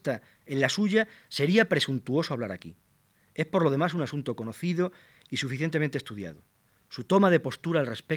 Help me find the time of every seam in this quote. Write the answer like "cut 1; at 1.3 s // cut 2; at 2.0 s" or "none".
none